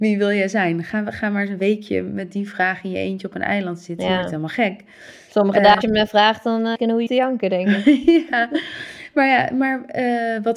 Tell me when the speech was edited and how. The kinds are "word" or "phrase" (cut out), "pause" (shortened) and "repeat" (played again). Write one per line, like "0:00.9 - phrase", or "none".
0:05.8 - word
0:06.7 - word
0:07.1 - word